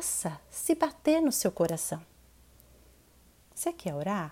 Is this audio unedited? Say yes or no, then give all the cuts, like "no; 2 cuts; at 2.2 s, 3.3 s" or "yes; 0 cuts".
yes; 0 cuts